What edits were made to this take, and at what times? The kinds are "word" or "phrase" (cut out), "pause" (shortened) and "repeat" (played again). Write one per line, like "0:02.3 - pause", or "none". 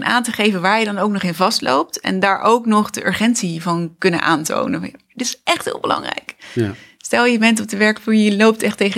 none

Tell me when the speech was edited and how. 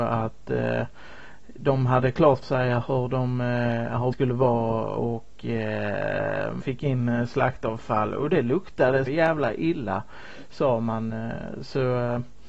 0:02.4 - word
0:04.1 - word
0:06.6 - word
0:09.1 - word

